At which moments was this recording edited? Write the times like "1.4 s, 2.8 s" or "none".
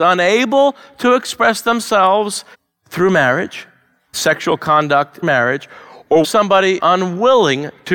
2.5 s, 4.1 s, 5.2 s, 6.2 s, 6.8 s